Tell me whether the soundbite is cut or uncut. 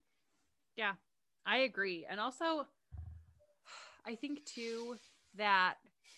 uncut